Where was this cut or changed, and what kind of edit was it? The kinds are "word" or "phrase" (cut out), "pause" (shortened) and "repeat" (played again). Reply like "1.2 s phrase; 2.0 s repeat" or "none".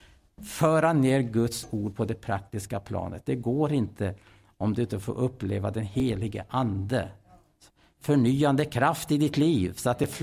none